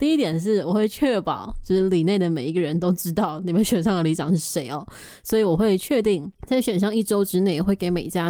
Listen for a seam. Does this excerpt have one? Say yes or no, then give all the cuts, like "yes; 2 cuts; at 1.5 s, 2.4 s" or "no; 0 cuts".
yes; 1 cut; at 6.4 s